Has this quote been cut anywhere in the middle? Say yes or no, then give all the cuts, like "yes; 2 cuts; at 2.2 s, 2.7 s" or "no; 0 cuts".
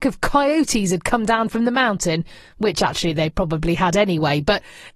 no; 0 cuts